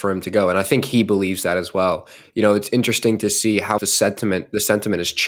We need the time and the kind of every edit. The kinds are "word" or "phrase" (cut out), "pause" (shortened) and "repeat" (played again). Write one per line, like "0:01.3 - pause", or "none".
0:03.8 - word